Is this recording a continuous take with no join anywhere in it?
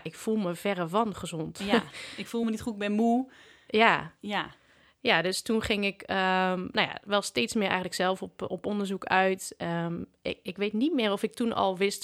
yes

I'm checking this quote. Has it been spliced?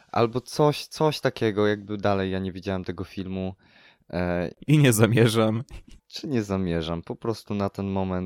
no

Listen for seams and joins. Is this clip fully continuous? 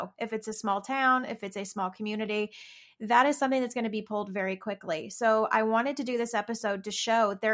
yes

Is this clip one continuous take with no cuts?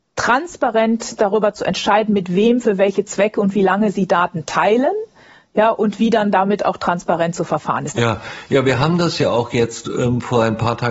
yes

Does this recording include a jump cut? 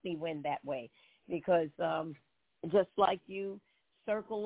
no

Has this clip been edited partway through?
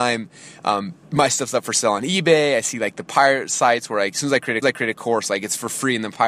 yes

